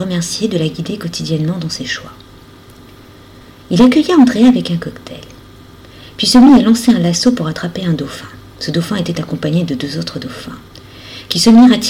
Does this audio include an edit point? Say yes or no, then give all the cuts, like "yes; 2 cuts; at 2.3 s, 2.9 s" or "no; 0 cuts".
no; 0 cuts